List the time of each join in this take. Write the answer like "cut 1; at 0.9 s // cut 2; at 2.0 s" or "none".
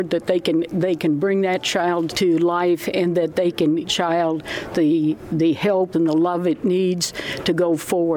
cut 1; at 2.1 s // cut 2; at 3.8 s // cut 3; at 5.9 s